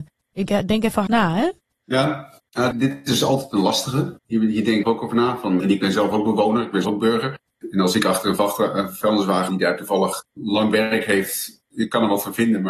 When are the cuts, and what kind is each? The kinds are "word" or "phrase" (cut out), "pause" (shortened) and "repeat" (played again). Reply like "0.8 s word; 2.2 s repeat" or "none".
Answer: 1.1 s word; 2.4 s pause; 4.2 s pause; 4.8 s phrase; 5.6 s word; 6.8 s word; 9.5 s phrase; 10.2 s word; 11.6 s word